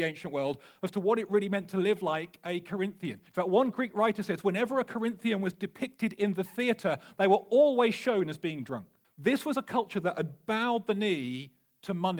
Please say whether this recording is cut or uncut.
cut